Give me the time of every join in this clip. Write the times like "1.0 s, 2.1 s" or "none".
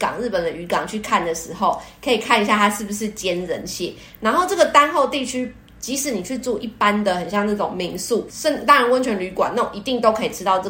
8.3 s